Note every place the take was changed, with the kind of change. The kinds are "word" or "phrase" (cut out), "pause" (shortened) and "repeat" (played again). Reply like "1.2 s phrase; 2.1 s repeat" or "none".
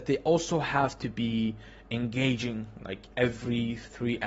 none